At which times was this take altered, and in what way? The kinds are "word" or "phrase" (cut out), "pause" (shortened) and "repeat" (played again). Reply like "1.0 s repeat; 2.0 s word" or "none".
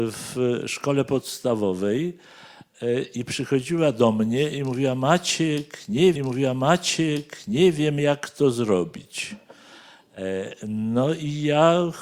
6.2 s repeat